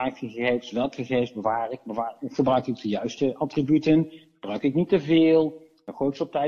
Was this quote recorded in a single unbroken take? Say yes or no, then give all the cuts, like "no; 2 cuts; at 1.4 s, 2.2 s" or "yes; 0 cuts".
yes; 0 cuts